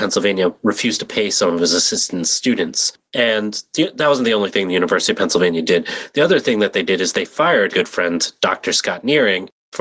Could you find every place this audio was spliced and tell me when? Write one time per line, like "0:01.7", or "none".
0:03.1
0:07.7